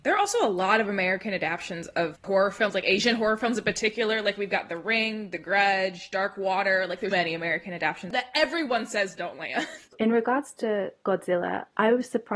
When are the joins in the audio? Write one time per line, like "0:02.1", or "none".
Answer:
0:02.1
0:07.1
0:09.9